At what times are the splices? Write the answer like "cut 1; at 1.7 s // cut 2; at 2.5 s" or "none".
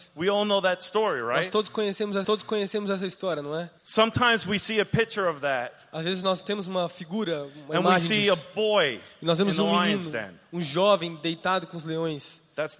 cut 1; at 2.2 s // cut 2; at 3.8 s